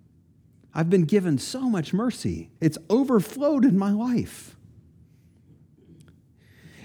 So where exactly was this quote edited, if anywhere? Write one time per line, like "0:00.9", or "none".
0:02.6